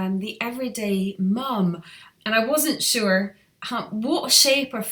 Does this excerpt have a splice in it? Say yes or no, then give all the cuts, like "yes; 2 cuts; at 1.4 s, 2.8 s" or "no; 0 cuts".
yes; 1 cut; at 2.2 s